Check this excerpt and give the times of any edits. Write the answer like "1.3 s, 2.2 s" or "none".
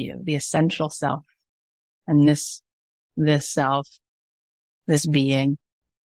none